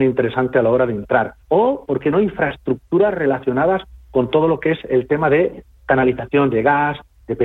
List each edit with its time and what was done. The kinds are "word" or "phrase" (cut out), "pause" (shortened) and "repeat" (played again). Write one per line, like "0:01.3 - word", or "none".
0:01.4 - pause